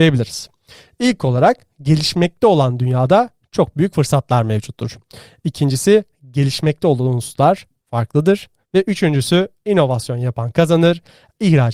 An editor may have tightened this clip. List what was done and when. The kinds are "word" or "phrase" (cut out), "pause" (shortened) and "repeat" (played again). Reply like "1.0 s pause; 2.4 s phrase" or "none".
none